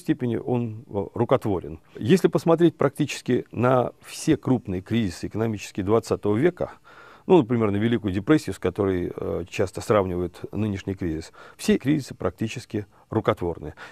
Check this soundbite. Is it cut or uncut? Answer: cut